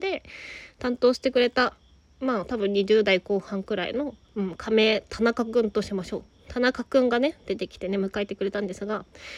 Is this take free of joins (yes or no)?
no